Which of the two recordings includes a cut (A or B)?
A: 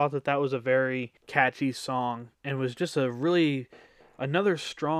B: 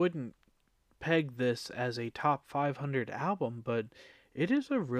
A